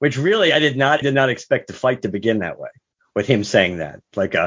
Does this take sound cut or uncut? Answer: cut